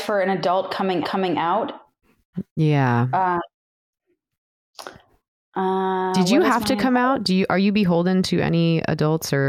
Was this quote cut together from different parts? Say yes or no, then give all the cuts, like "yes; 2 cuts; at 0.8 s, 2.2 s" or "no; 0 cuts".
yes; 1 cut; at 1.0 s